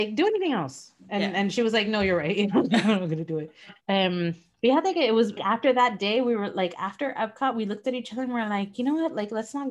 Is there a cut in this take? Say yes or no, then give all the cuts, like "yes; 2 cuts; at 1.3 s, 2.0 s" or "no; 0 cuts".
yes; 2 cuts; at 3.8 s, 5.4 s